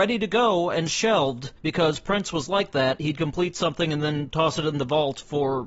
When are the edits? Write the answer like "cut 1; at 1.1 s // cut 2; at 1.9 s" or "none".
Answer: cut 1; at 1.6 s